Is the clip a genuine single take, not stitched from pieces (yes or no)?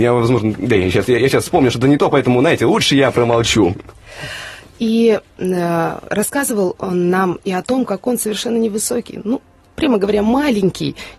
yes